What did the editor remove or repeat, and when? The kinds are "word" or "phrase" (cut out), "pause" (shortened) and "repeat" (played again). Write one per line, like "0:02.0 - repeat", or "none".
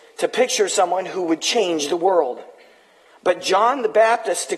none